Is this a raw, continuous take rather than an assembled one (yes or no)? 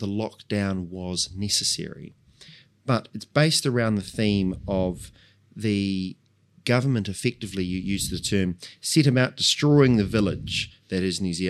yes